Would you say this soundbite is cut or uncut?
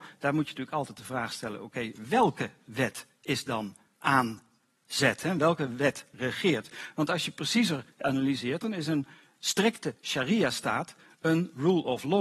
uncut